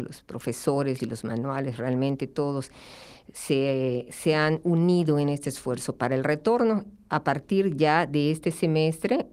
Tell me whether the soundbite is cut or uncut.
cut